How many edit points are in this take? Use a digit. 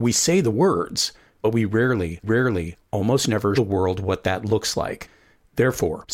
2